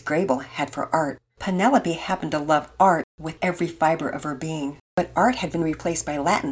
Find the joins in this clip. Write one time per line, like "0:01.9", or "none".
0:01.3
0:03.1
0:04.8